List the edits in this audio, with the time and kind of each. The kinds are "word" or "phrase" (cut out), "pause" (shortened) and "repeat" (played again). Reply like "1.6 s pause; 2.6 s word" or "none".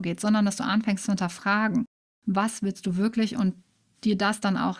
none